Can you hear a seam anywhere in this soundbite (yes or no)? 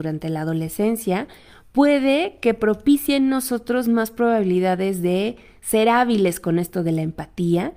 no